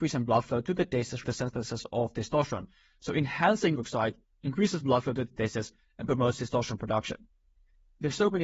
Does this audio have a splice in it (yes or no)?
yes